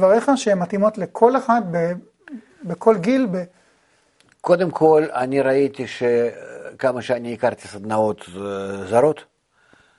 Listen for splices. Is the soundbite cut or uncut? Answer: uncut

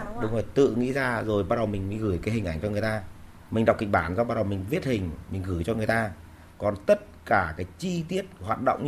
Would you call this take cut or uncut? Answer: uncut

